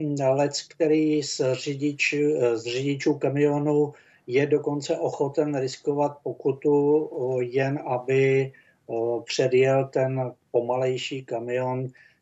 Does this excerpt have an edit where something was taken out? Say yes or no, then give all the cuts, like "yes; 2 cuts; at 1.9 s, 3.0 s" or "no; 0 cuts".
no; 0 cuts